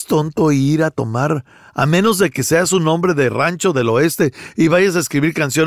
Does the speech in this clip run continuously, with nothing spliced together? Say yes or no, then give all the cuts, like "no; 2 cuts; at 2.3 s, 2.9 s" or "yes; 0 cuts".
yes; 0 cuts